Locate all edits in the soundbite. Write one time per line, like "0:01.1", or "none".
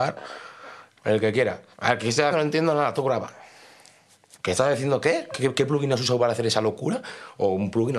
0:01.0
0:01.7
0:02.3
0:04.3